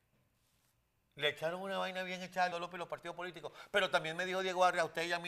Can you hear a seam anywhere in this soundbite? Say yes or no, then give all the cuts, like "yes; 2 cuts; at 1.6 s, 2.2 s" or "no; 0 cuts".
yes; 1 cut; at 2.5 s